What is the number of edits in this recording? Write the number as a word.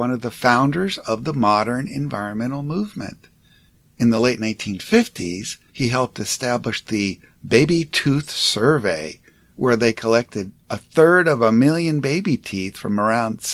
zero